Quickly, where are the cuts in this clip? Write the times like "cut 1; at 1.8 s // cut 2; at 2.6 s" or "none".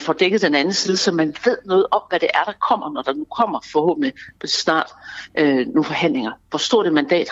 none